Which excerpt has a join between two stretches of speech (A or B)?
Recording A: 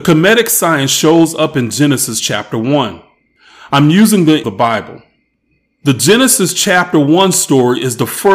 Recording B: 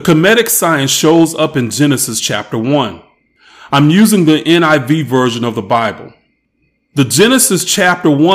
A